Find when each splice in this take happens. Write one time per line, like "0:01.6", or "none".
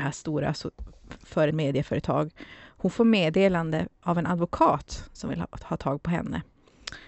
0:01.5